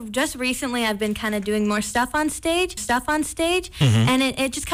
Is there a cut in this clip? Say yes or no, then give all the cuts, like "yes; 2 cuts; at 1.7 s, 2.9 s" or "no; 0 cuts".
yes; 1 cut; at 2.8 s